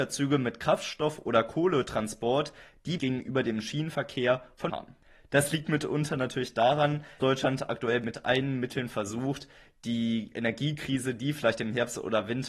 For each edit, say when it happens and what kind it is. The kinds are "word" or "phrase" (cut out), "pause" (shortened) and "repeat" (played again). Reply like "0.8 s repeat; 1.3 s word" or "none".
3.0 s word; 4.7 s word; 7.2 s word